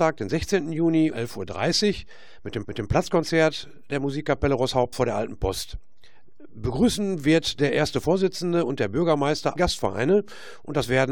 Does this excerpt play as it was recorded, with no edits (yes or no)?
no